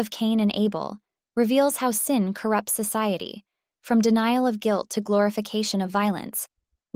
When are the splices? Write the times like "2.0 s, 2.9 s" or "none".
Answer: none